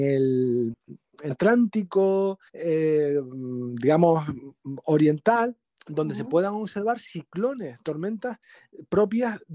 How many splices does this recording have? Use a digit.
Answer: 3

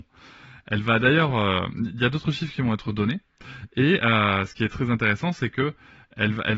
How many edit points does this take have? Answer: 0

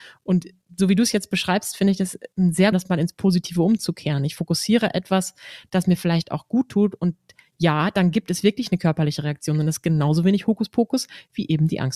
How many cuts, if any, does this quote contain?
1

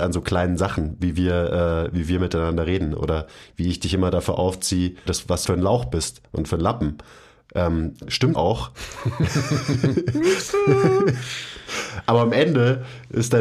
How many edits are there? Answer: 3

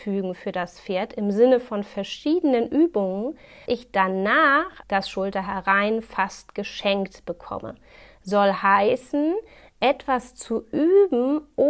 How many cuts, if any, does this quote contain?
2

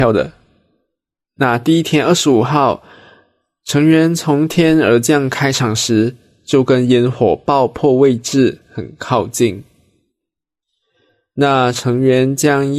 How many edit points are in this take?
0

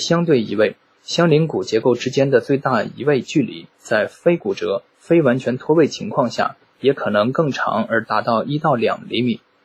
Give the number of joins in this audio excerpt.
1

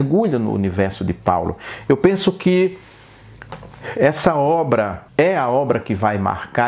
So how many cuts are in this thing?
1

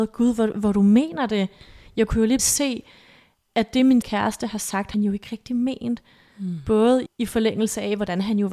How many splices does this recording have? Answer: 4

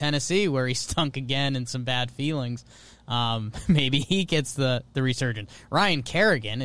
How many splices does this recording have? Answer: 0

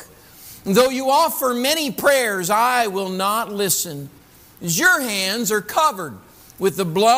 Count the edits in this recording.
0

